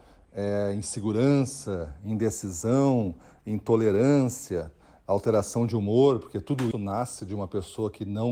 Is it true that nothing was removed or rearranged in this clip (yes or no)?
no